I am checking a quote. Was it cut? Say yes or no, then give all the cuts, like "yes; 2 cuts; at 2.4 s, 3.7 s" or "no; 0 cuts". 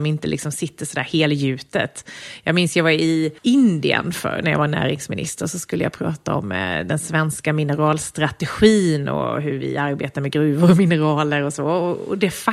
yes; 1 cut; at 3.4 s